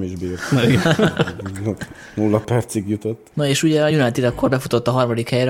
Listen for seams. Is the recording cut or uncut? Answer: uncut